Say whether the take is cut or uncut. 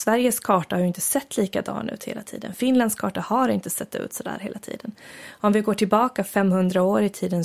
uncut